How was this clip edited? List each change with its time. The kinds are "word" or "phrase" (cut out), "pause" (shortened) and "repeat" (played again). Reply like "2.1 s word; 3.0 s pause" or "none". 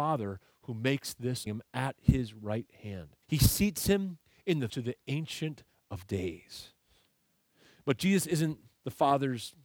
1.5 s phrase; 3.2 s pause; 4.7 s phrase